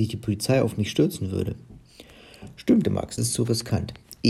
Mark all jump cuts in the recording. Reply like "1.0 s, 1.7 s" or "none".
2.8 s, 3.2 s